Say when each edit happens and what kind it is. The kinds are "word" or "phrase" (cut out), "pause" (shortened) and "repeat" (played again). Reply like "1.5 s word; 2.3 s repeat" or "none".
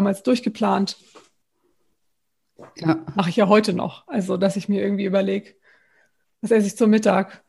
none